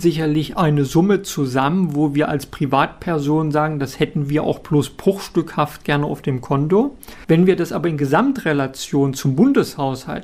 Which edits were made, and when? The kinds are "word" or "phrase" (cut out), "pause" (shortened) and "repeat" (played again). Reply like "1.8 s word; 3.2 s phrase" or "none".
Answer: none